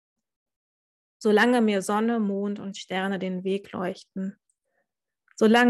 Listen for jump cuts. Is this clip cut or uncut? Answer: uncut